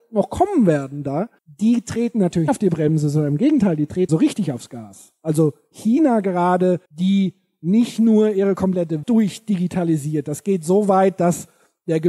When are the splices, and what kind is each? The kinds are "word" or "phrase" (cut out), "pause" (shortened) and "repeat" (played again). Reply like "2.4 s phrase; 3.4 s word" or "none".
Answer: 1.4 s pause; 2.5 s word; 4.1 s word; 6.8 s pause; 9.0 s word